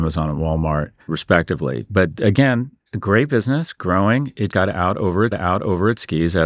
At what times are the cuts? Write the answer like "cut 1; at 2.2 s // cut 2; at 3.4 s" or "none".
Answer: cut 1; at 1.0 s // cut 2; at 2.9 s // cut 3; at 4.5 s // cut 4; at 5.3 s